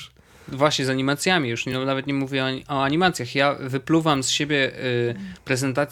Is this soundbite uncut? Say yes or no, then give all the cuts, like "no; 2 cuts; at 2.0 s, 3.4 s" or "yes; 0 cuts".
yes; 0 cuts